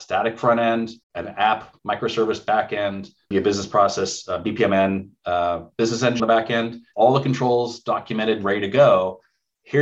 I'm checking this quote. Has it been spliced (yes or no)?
yes